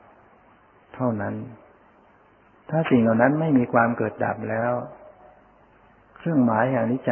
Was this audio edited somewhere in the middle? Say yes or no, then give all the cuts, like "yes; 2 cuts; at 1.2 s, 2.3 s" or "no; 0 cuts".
no; 0 cuts